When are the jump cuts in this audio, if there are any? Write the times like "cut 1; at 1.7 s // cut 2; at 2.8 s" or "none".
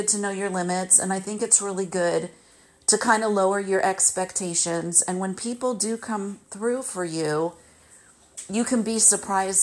none